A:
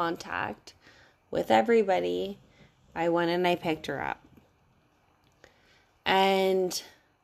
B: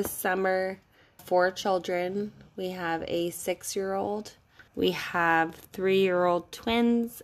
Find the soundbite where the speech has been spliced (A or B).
B